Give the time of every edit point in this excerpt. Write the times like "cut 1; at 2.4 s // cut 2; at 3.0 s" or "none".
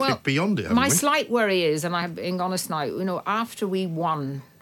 none